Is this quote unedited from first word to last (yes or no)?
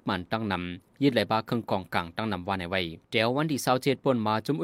no